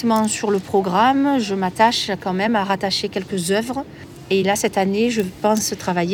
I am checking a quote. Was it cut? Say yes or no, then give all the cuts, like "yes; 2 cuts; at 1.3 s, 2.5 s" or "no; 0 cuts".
no; 0 cuts